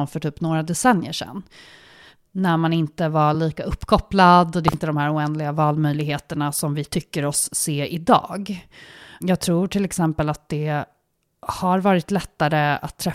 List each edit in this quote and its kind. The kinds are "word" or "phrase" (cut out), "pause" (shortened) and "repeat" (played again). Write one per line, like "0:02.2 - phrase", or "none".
none